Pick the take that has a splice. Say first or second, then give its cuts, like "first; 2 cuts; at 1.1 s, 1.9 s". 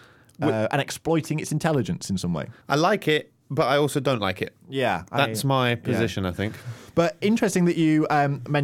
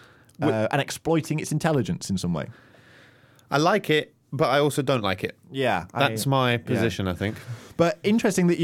first; 1 cut; at 2.6 s